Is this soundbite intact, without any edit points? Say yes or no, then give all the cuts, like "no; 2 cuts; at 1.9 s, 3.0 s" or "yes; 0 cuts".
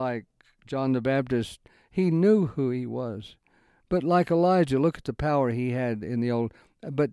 yes; 0 cuts